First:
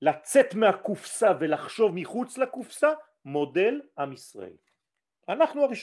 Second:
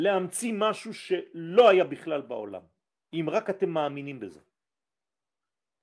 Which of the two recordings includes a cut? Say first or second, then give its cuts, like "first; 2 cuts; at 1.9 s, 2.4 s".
second; 1 cut; at 2.9 s